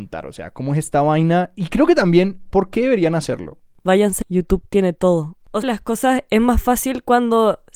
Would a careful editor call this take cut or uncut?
cut